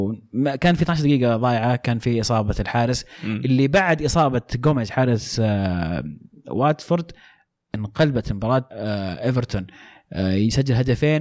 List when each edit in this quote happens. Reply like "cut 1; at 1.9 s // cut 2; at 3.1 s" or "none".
cut 1; at 8.7 s